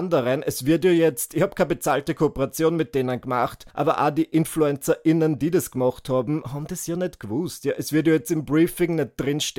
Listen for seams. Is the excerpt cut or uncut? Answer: cut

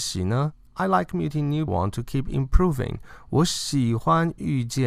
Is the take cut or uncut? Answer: cut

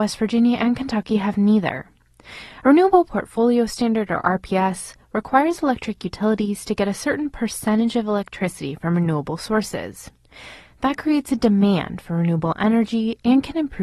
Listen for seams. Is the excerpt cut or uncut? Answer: uncut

